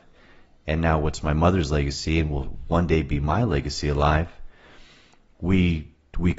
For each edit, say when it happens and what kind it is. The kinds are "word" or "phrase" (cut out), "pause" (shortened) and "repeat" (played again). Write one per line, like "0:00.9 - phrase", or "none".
none